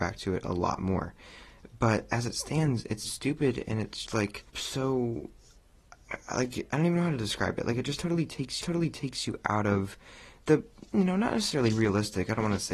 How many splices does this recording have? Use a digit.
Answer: 5